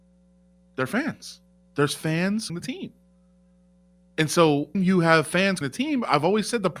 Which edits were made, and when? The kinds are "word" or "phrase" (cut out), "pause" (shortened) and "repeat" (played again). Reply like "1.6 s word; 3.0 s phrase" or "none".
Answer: 2.5 s word; 4.7 s word; 5.6 s word